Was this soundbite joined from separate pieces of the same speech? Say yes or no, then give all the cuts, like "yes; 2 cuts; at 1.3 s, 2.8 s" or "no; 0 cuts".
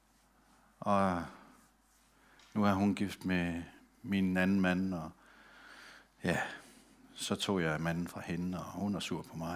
no; 0 cuts